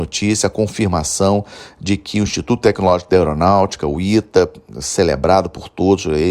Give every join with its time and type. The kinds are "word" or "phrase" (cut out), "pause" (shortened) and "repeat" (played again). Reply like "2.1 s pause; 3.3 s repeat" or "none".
none